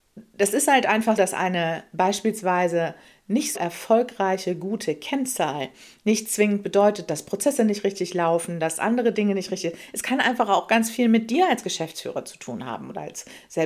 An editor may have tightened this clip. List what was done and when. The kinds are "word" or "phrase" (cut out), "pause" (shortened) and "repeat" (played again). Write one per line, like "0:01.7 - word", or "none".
0:01.2 - word
0:03.5 - word